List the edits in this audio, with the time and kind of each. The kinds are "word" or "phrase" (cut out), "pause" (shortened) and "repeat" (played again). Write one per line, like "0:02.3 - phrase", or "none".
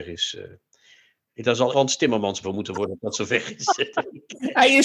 0:01.7 - word
0:02.4 - word
0:02.7 - word

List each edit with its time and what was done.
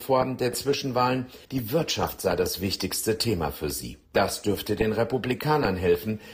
0:01.4 - pause
0:04.1 - pause

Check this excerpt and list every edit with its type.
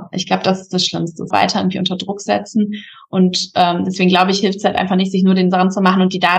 0:01.3 - phrase

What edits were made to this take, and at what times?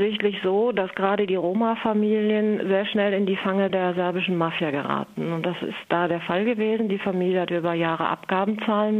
none

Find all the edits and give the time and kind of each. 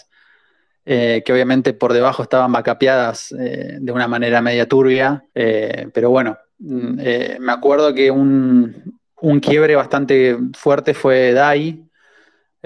0:05.3 - pause

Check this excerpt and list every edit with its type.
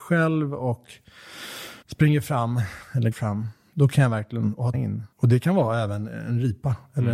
0:01.8 - pause
0:03.1 - word
0:04.7 - phrase
0:05.1 - pause

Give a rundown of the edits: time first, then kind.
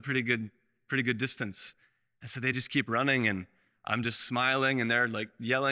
none

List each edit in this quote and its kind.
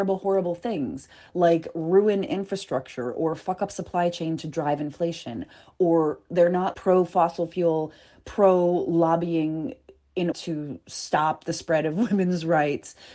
0:06.7 - word
0:10.3 - word

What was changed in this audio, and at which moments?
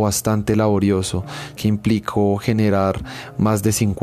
0:01.6 - word

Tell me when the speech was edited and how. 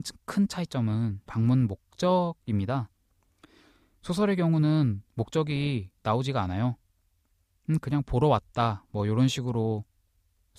0:01.3 - word

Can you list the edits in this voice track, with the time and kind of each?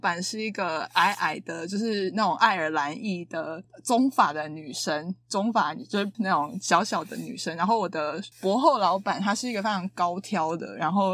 0:06.1 - word
0:08.3 - pause

